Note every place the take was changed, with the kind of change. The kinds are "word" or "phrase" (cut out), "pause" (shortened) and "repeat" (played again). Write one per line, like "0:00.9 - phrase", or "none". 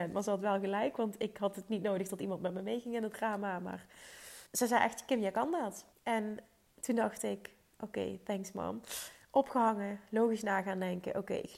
0:04.5 - pause
0:05.9 - pause